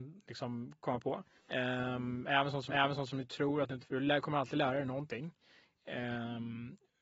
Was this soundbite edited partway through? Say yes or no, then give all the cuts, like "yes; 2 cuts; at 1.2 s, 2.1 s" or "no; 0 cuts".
yes; 3 cuts; at 1.4 s, 2.7 s, 3.8 s